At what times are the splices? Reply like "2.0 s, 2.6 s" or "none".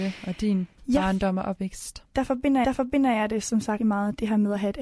2.6 s, 3.8 s